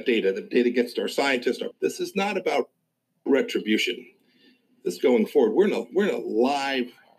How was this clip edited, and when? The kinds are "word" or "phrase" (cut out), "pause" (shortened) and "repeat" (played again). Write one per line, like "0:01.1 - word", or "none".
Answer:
0:01.7 - word
0:05.0 - word